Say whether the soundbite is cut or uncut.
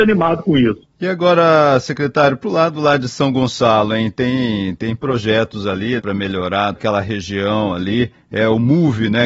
cut